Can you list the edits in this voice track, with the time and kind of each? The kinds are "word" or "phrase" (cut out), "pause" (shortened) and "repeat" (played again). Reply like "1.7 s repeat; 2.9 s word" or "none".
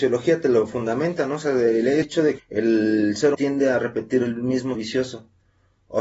2.0 s word; 2.4 s word; 3.3 s word; 4.7 s word